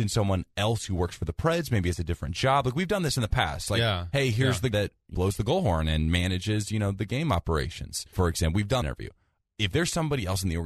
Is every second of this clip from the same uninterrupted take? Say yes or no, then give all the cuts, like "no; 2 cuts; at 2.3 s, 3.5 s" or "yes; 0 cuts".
no; 4 cuts; at 4.7 s, 5.1 s, 8.1 s, 8.8 s